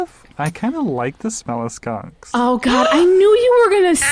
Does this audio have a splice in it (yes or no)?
no